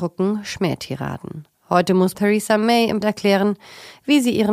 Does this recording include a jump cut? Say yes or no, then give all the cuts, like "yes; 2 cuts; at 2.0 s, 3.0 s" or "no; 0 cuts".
yes; 2 cuts; at 2.1 s, 3.0 s